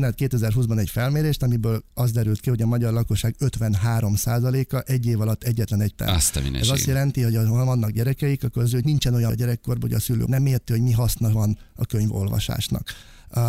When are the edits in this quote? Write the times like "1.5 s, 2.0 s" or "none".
5.9 s, 8.8 s, 9.3 s, 10.3 s